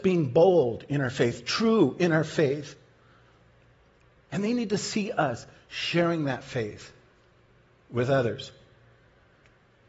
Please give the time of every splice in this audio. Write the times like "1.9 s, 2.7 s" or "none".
none

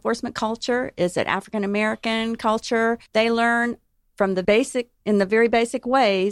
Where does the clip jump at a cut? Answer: 3.1 s, 4.4 s

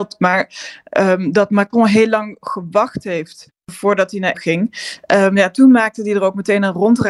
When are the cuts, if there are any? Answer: 3.6 s, 4.3 s

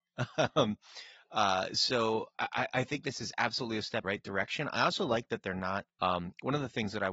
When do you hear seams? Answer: 2.3 s, 4.0 s

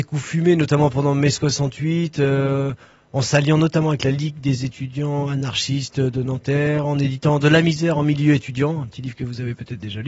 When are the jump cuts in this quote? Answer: none

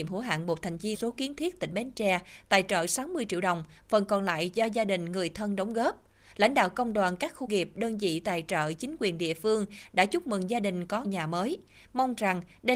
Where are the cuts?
0.9 s, 7.5 s, 11.0 s

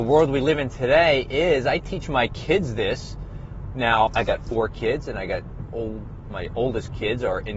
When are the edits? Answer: 4.1 s, 5.7 s

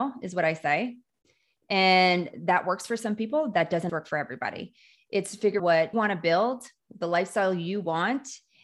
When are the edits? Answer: 3.9 s, 5.6 s, 5.9 s

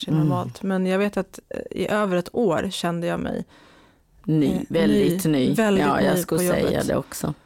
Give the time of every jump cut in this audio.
none

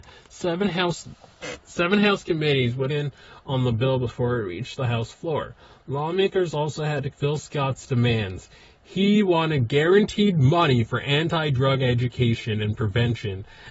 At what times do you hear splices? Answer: 2.9 s, 7.1 s

